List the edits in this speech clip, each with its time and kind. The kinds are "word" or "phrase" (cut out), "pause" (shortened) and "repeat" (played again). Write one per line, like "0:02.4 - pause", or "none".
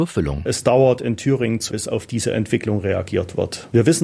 0:01.7 - word